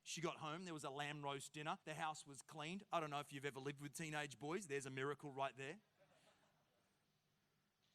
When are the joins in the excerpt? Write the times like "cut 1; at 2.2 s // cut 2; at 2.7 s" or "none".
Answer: cut 1; at 1.8 s